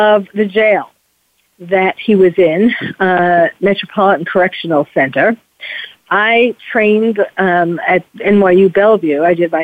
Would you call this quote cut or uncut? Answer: uncut